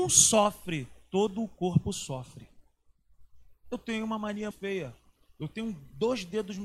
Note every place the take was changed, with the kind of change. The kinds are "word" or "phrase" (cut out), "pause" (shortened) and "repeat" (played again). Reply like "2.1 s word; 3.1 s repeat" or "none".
4.5 s word

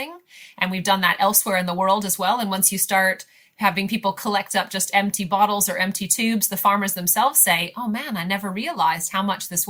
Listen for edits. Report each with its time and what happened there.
none

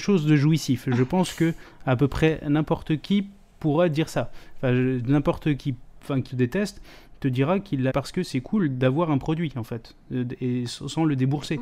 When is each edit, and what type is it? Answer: 5.6 s word; 6.3 s word; 7.9 s word

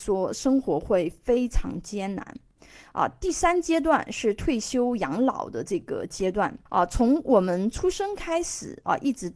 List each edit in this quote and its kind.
6.7 s pause

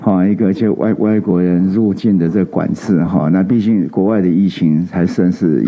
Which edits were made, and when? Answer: none

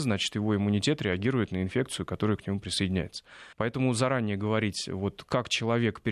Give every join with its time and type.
3.5 s pause

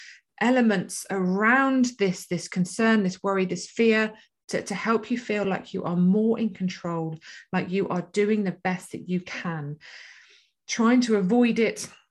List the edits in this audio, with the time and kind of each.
none

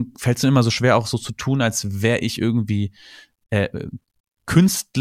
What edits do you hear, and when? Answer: none

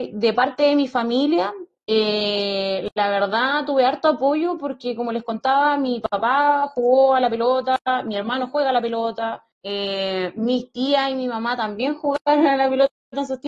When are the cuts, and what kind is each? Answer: 9.5 s pause

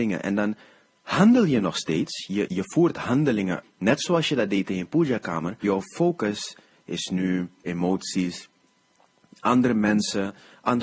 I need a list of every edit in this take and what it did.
2.5 s word; 3.6 s word; 5.6 s word; 7.7 s word

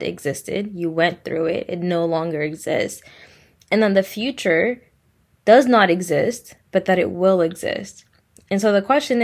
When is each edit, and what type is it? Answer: none

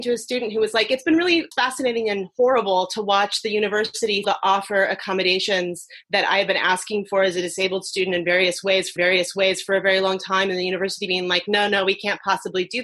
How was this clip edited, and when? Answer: 4.2 s phrase; 9.0 s repeat

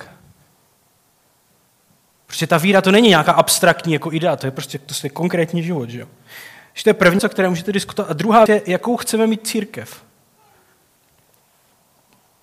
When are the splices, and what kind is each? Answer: 7.2 s word; 8.5 s word

